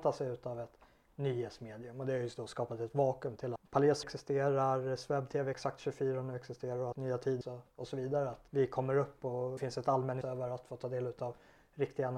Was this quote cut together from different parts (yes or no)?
yes